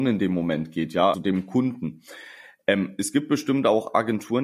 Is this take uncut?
no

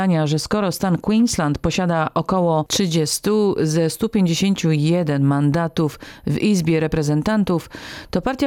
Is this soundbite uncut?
yes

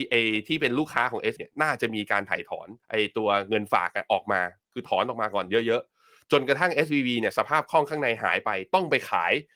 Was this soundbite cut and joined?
yes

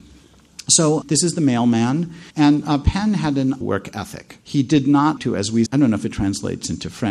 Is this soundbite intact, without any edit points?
no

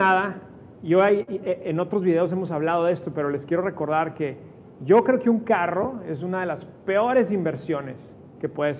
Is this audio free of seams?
yes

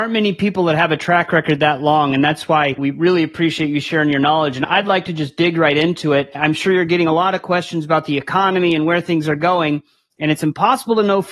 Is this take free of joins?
yes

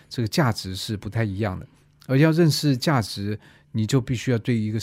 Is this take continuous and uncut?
yes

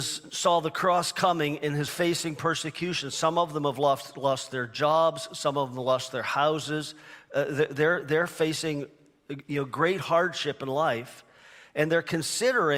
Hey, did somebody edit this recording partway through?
yes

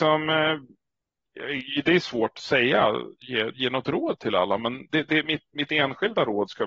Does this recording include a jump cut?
no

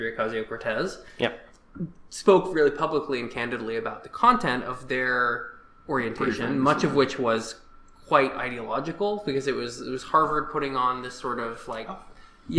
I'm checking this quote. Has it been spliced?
no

